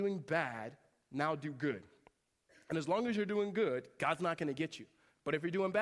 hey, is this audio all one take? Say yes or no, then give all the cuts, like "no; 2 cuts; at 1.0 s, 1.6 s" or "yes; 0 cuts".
yes; 0 cuts